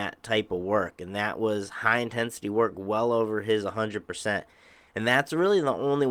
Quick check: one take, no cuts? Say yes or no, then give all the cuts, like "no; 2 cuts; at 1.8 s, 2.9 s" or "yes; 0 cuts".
yes; 0 cuts